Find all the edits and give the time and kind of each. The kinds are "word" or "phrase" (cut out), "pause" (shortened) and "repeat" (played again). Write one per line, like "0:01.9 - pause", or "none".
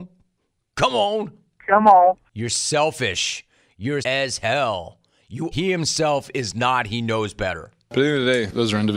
0:04.0 - word
0:05.5 - phrase